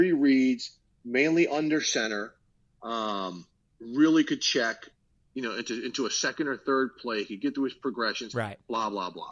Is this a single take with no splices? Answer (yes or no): yes